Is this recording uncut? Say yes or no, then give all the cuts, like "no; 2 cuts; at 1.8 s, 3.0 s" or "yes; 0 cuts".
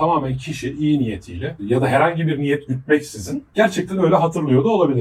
yes; 0 cuts